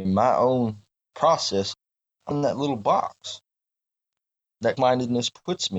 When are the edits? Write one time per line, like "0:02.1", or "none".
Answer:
0:02.3
0:04.8